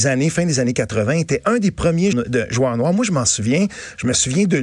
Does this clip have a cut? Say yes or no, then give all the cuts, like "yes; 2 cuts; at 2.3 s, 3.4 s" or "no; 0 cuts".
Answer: yes; 1 cut; at 2.1 s